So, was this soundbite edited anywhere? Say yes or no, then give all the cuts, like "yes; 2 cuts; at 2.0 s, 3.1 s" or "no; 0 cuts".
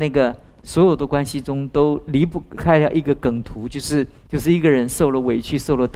yes; 1 cut; at 4.2 s